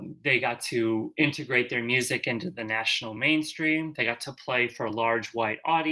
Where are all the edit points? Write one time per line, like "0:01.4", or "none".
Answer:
none